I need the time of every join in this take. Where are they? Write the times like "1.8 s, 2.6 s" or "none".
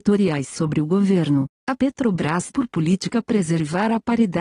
2.5 s